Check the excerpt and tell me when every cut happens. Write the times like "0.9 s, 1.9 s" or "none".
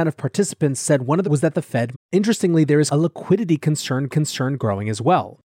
1.2 s, 1.9 s, 2.9 s, 4.1 s